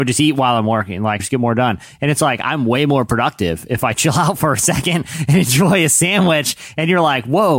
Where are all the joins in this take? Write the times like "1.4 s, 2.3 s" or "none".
1.2 s